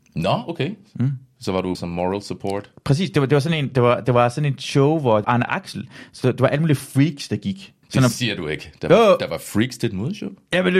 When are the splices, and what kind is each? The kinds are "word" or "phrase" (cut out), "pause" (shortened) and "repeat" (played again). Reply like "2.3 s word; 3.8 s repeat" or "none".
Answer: 1.7 s word; 5.2 s word; 7.8 s pause